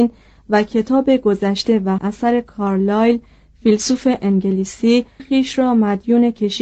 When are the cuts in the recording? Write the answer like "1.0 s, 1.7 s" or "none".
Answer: 2.0 s, 5.2 s